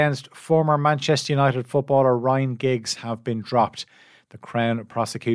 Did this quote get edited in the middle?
no; 0 cuts

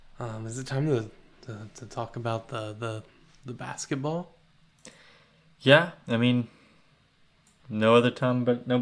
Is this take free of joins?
yes; 0 cuts

